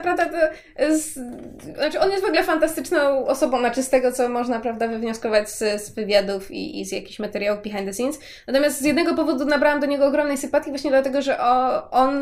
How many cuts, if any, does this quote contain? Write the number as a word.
zero